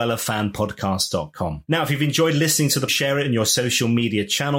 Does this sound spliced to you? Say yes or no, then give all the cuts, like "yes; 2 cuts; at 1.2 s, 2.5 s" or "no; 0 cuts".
yes; 1 cut; at 2.9 s